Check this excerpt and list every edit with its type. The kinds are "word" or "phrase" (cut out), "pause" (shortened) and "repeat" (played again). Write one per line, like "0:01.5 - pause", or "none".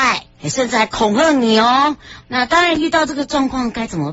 0:02.2 - word